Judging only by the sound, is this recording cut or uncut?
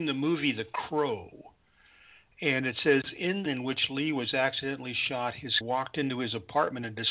cut